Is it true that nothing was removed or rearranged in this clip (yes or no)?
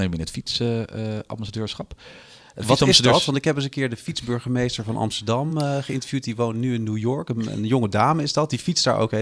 yes